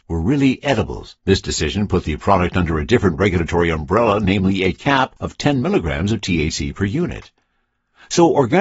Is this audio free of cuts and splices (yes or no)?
no